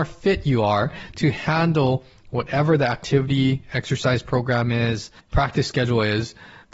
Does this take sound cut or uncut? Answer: uncut